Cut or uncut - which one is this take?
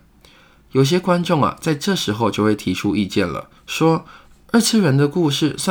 cut